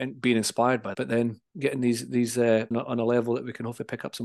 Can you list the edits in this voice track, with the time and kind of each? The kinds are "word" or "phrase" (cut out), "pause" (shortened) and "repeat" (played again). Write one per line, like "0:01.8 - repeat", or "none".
0:00.9 - word
0:01.5 - pause
0:02.7 - phrase